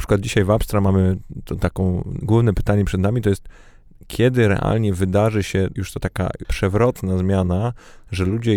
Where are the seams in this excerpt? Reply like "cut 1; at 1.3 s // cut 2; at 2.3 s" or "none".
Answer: cut 1; at 2.2 s // cut 2; at 5.8 s // cut 3; at 6.4 s